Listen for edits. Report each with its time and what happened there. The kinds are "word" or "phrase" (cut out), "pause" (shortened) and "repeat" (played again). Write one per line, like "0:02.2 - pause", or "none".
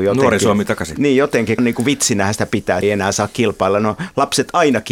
0:01.6 - word
0:02.8 - word